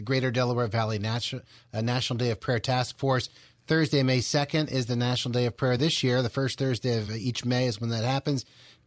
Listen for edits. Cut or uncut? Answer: uncut